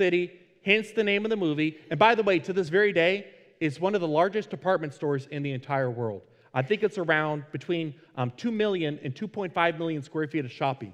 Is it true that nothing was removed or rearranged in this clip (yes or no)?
yes